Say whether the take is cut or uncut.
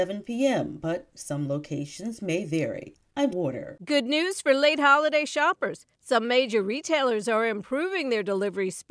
cut